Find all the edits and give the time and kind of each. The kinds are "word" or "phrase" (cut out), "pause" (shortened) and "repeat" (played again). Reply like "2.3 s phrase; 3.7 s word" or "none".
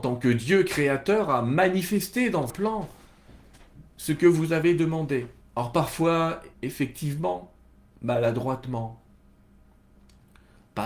2.5 s word; 5.4 s pause; 6.5 s pause